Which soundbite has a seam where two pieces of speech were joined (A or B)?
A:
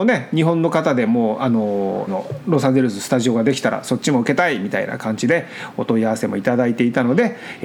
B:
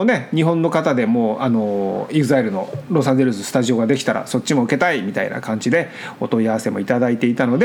A